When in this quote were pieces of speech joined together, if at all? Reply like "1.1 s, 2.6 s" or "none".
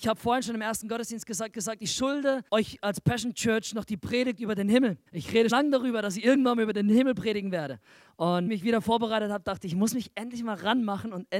1.5 s, 2.5 s, 5.1 s, 5.5 s, 8.5 s